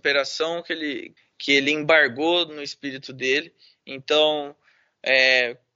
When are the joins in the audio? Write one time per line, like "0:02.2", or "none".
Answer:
none